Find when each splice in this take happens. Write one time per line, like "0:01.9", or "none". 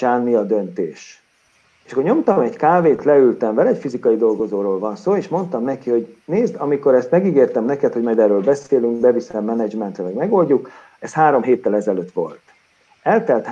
0:01.6